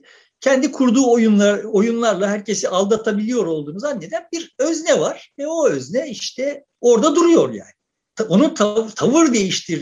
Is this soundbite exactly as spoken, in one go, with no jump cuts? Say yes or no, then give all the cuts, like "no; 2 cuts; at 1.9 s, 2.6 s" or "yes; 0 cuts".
no; 1 cut; at 6.7 s